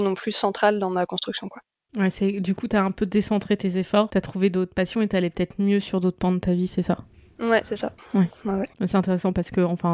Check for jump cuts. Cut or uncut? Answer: uncut